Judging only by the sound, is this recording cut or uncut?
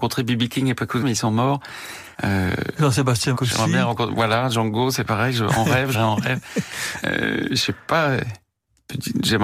cut